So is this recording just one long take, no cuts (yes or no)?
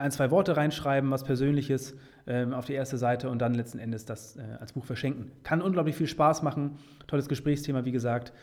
yes